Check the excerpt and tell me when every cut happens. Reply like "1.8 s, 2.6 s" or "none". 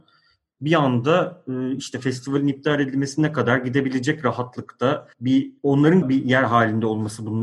5.1 s, 6.0 s